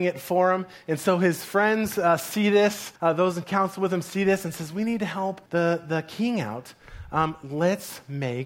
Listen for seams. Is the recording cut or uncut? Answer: cut